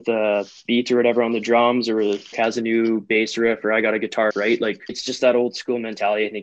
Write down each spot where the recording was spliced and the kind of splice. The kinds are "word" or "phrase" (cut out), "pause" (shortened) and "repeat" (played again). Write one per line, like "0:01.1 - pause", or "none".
0:02.3 - word
0:04.3 - word
0:04.9 - word